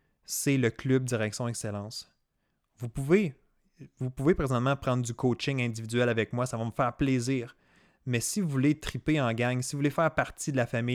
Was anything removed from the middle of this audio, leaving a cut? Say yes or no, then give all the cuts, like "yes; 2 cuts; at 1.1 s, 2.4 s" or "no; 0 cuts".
no; 0 cuts